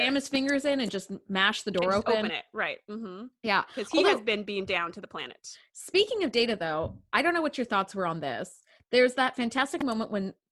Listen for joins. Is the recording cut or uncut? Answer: uncut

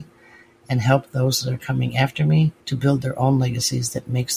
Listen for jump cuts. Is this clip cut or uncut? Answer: cut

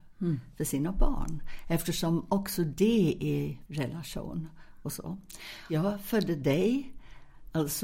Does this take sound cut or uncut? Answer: cut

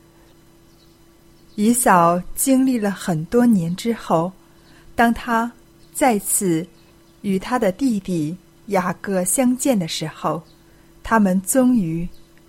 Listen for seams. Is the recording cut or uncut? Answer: uncut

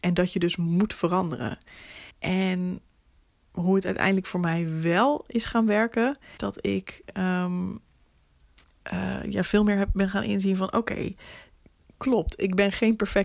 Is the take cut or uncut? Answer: cut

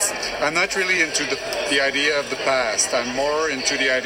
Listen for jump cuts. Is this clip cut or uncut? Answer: uncut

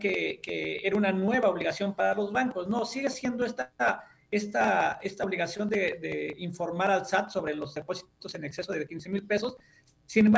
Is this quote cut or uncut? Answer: uncut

